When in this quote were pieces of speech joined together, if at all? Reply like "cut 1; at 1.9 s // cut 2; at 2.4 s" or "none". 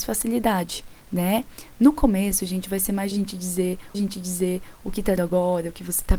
cut 1; at 1.0 s // cut 2; at 3.1 s // cut 3; at 3.9 s // cut 4; at 5.2 s

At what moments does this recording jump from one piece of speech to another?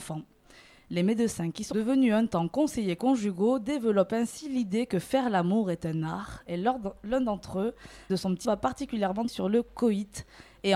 cut 1; at 1.7 s // cut 2; at 8.1 s // cut 3; at 8.4 s // cut 4; at 9.3 s

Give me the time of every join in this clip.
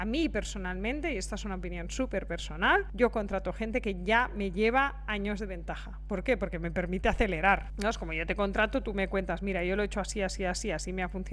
none

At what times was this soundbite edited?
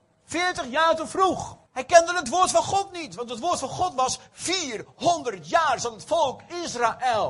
cut 1; at 1.7 s

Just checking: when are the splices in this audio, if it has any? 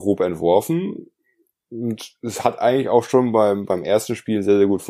none

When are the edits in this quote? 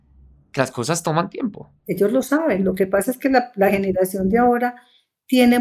cut 1; at 1.8 s

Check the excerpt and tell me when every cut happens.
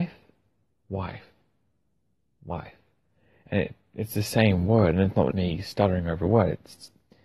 cut 1; at 5.3 s

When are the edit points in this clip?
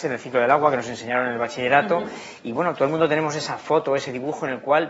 none

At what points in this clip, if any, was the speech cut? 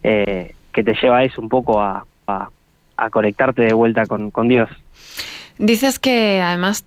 cut 1; at 2.3 s

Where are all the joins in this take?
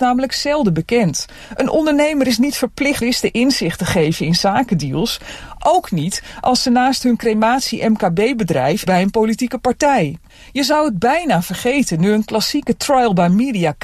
cut 1; at 3.0 s // cut 2; at 8.9 s // cut 3; at 10.3 s

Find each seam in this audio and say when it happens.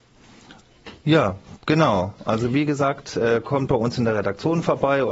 none

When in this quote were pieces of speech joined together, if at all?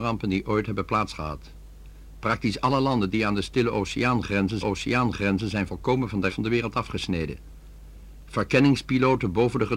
cut 1; at 4.6 s // cut 2; at 6.3 s

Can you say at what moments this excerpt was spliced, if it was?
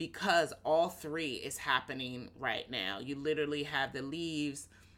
none

